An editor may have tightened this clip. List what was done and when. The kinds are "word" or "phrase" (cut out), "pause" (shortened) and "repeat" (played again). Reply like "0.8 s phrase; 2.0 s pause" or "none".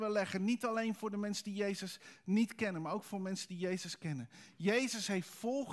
none